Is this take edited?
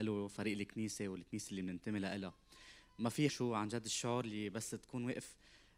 yes; 1 cut; at 3.3 s

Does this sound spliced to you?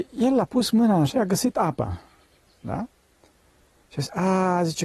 yes; 1 cut; at 1.1 s

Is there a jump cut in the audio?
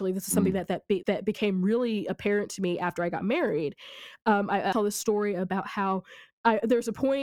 yes; 2 cuts; at 1.0 s, 4.7 s

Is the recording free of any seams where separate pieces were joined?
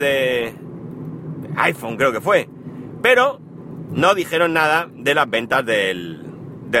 yes; 0 cuts

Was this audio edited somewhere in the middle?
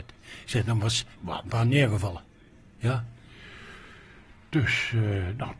yes; 2 cuts; at 1.2 s, 1.5 s

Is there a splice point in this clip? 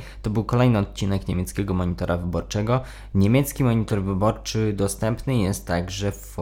no; 0 cuts

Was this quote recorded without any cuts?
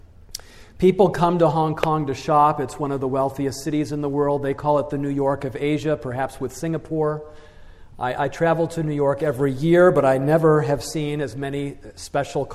yes; 0 cuts

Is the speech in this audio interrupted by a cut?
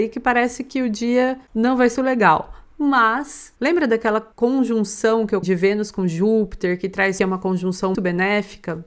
yes; 6 cuts; at 1.9 s, 3.6 s, 4.3 s, 5.4 s, 7.2 s, 7.9 s

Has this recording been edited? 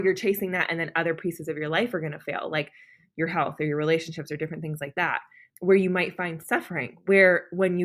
yes; 1 cut; at 5.5 s

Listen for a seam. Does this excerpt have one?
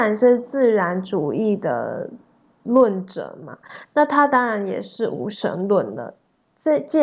no; 0 cuts

